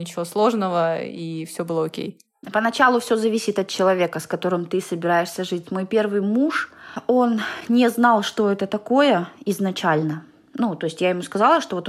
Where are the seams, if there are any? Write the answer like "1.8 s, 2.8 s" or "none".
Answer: none